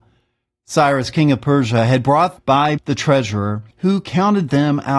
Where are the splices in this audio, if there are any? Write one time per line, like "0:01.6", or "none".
0:02.4
0:02.8
0:03.7